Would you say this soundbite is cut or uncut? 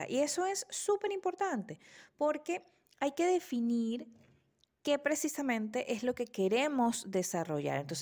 uncut